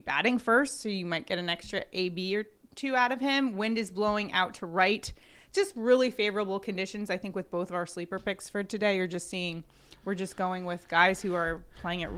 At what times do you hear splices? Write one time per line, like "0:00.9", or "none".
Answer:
none